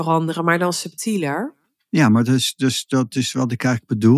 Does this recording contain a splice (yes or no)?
no